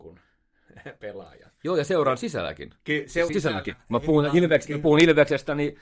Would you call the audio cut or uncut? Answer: cut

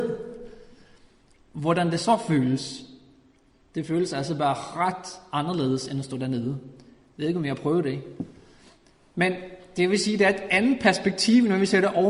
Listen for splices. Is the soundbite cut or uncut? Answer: uncut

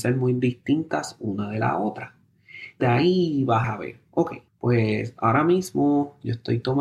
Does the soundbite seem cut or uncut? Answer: cut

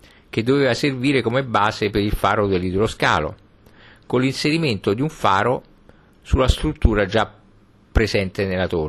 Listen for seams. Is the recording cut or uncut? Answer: uncut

